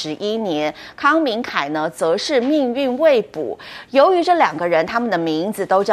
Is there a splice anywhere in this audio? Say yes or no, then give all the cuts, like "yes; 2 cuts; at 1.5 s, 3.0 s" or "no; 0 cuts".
no; 0 cuts